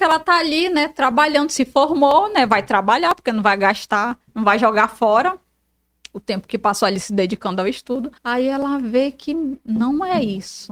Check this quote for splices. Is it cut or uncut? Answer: cut